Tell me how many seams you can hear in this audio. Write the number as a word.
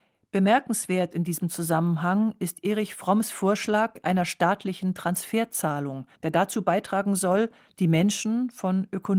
one